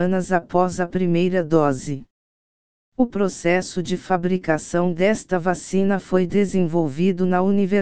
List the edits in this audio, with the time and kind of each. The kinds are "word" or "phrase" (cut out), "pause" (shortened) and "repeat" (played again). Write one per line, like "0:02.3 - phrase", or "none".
none